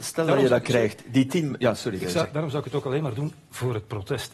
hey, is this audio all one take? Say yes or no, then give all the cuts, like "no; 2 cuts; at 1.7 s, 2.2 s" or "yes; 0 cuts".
yes; 0 cuts